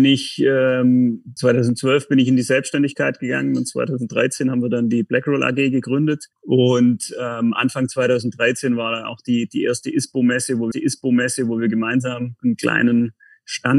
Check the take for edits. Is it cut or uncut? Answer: cut